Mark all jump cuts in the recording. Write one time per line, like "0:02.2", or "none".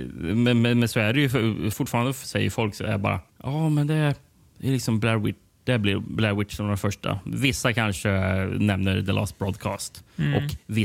0:01.7
0:03.3